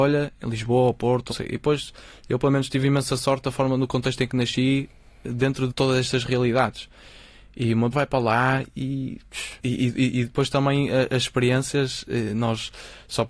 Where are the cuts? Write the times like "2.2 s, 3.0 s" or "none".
1.3 s, 5.7 s, 7.9 s, 9.6 s